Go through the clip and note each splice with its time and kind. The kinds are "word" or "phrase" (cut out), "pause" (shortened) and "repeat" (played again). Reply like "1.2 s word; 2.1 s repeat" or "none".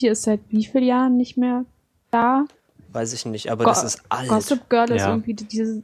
none